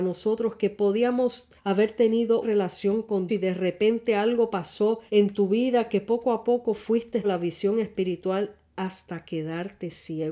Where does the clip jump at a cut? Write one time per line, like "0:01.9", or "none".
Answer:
0:01.6
0:02.4
0:03.3
0:05.1
0:07.2